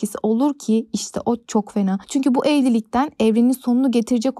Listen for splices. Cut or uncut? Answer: cut